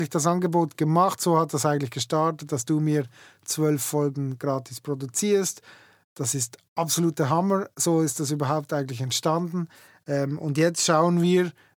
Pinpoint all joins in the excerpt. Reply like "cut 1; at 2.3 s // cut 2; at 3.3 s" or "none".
none